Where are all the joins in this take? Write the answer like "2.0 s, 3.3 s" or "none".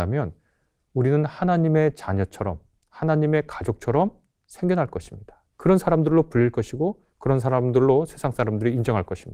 2.8 s, 4.3 s, 5.5 s, 7.1 s